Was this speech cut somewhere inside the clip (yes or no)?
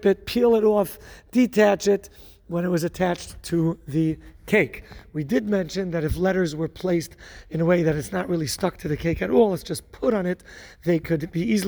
no